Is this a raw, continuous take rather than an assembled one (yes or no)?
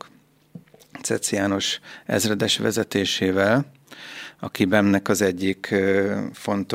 yes